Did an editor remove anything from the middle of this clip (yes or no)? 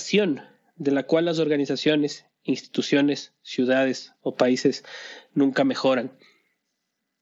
no